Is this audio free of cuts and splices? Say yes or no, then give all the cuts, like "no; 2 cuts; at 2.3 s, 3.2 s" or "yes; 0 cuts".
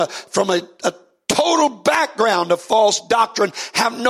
yes; 0 cuts